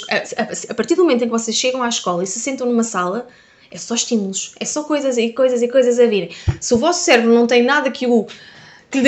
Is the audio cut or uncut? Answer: uncut